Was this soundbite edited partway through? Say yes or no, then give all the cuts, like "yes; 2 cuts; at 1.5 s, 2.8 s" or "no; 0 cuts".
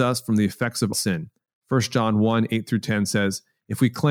yes; 1 cut; at 0.9 s